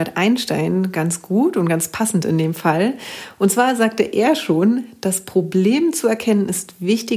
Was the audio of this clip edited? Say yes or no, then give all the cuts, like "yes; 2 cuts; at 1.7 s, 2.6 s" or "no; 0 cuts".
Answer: no; 0 cuts